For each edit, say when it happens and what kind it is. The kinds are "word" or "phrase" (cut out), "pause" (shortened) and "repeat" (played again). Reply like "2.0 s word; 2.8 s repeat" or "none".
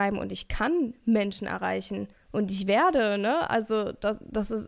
2.1 s pause